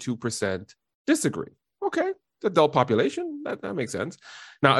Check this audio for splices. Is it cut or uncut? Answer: uncut